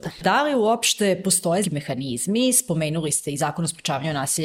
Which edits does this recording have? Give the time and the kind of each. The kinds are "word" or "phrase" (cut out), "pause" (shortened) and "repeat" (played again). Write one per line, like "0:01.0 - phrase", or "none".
0:01.6 - word